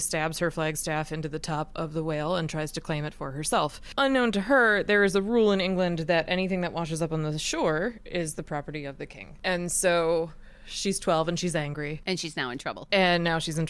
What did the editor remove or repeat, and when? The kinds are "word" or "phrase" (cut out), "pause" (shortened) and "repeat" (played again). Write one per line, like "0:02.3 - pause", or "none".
none